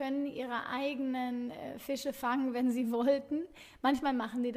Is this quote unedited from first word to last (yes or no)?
yes